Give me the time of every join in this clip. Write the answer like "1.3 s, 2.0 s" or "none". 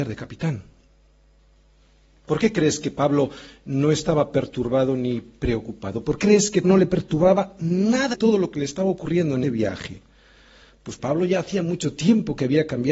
6.2 s, 6.6 s, 8.1 s, 9.4 s, 11.0 s